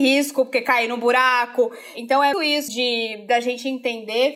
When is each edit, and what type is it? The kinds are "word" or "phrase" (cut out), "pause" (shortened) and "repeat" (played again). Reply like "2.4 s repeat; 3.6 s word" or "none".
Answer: 2.3 s word; 2.7 s word